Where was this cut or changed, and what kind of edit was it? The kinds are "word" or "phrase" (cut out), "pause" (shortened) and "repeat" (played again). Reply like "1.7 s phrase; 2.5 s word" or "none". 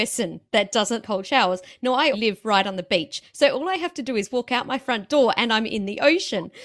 1.0 s word; 2.1 s word